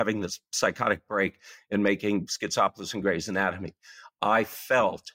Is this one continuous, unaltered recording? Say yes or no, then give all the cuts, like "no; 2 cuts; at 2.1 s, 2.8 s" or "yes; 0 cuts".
yes; 0 cuts